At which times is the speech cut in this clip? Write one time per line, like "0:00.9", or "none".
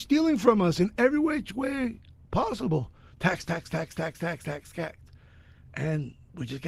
none